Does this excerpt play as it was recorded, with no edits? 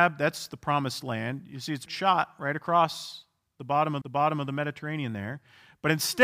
no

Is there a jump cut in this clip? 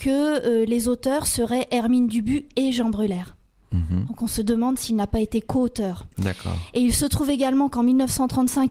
no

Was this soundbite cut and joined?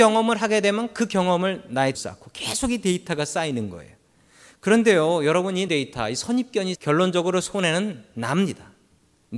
yes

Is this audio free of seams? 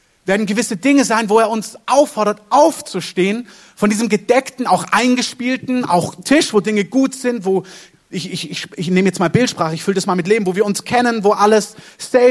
yes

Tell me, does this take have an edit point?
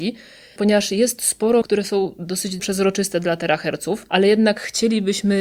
yes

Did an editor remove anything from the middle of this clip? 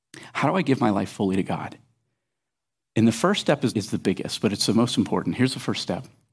yes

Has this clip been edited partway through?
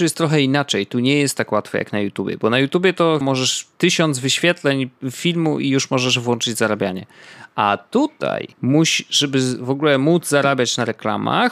yes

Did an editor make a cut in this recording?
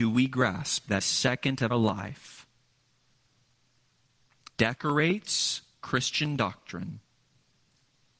yes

